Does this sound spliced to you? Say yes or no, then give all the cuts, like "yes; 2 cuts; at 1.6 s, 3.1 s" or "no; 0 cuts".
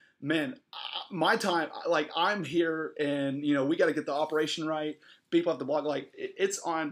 no; 0 cuts